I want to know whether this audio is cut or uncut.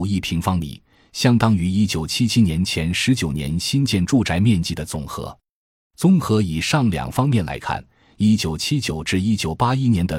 uncut